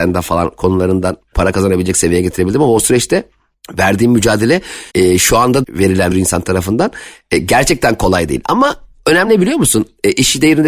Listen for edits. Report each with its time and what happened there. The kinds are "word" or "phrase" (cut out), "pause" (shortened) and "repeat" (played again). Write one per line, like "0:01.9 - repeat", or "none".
0:04.9 - pause
0:05.6 - word
0:06.1 - phrase
0:09.3 - word